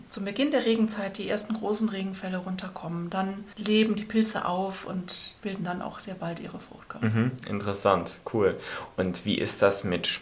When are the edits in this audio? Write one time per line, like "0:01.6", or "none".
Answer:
none